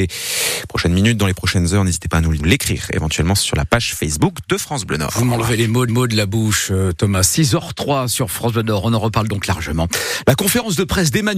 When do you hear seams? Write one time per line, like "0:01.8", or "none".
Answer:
0:02.4
0:05.9